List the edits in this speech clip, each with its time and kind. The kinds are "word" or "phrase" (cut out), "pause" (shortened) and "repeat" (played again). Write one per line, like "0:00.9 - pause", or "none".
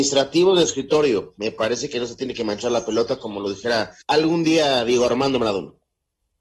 0:04.0 - pause